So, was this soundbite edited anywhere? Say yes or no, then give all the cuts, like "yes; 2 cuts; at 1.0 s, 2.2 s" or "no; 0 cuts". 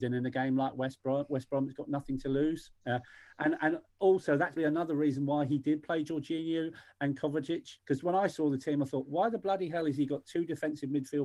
yes; 4 cuts; at 2.8 s, 3.9 s, 4.6 s, 7.8 s